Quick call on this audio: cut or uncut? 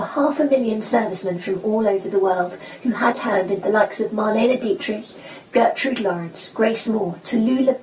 cut